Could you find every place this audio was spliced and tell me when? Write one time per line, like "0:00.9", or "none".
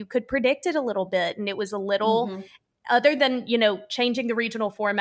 none

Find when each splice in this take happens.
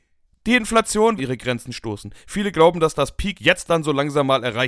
0:01.2

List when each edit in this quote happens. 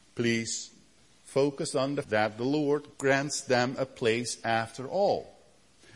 0:01.0
0:02.0
0:02.9

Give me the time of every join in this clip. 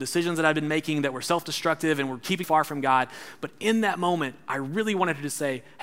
0:02.4

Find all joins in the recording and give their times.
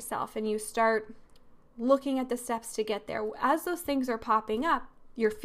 none

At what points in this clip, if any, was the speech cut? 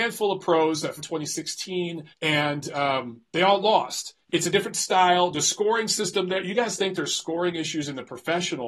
0:01.0
0:02.1
0:04.2

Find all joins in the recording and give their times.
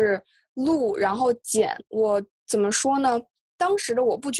none

